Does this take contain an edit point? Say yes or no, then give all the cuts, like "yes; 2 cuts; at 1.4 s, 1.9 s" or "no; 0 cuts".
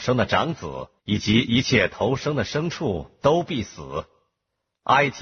yes; 1 cut; at 1.0 s